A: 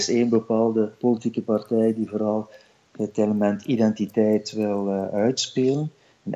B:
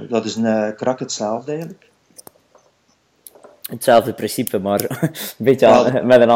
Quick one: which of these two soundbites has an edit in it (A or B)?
A